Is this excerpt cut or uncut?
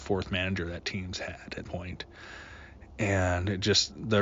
cut